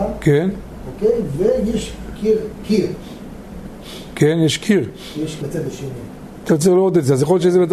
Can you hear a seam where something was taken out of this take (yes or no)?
yes